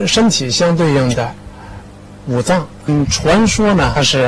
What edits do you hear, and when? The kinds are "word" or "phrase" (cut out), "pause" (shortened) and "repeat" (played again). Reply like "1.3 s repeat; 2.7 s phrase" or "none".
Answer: none